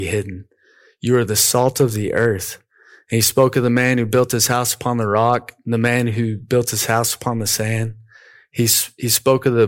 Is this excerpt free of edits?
yes; 0 cuts

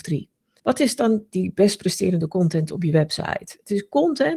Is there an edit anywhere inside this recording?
no; 0 cuts

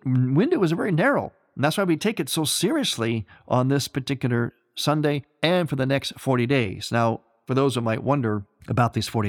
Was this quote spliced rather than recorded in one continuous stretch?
no; 0 cuts

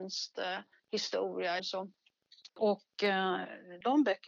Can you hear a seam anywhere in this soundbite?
yes; 2 cuts; at 1.6 s, 2.5 s

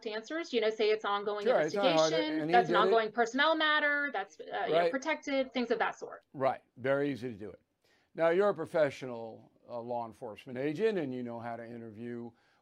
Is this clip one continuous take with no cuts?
yes; 0 cuts

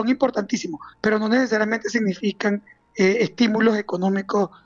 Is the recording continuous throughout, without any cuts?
yes; 0 cuts

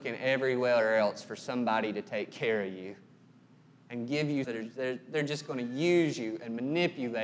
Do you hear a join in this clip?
yes; 1 cut; at 4.4 s

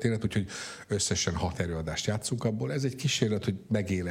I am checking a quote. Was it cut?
no; 0 cuts

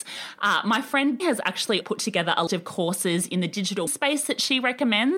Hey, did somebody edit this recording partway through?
yes; 4 cuts; at 1.2 s, 1.8 s, 2.5 s, 3.9 s

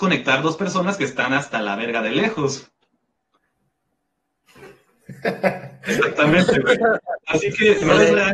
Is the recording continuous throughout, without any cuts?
yes; 0 cuts

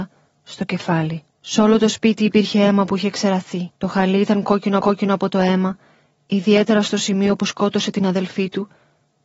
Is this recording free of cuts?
no; 3 cuts; at 1.3 s, 3.8 s, 4.8 s

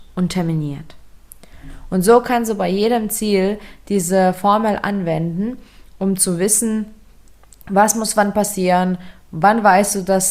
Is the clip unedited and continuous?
yes; 0 cuts

